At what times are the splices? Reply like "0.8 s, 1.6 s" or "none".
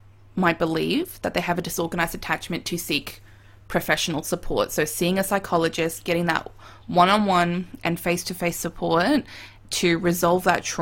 9.6 s